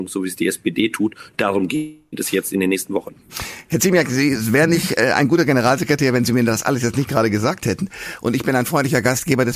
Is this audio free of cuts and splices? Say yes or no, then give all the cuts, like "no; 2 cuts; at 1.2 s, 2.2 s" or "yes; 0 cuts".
yes; 0 cuts